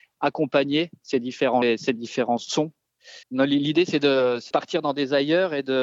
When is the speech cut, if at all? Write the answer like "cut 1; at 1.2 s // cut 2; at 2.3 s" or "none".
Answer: cut 1; at 1.6 s // cut 2; at 3.2 s